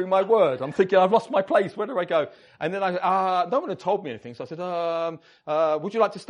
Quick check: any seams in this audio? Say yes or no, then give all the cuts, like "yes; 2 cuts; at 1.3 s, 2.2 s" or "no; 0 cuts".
no; 0 cuts